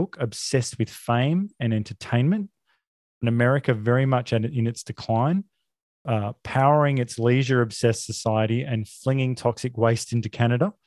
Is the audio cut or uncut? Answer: uncut